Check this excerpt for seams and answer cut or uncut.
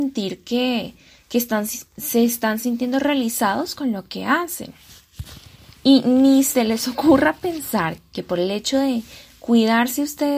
uncut